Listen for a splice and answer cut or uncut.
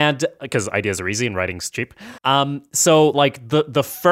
cut